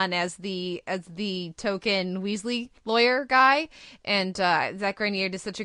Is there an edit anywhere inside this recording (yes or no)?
yes